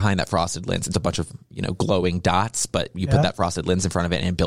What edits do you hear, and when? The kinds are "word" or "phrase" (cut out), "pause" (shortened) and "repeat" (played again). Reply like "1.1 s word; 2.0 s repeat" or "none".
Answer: 0.9 s word